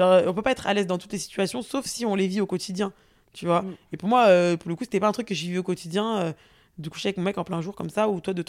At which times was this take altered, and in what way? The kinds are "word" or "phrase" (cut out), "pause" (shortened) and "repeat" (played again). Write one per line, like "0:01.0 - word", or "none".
none